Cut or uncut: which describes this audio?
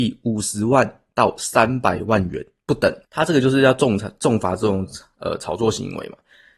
cut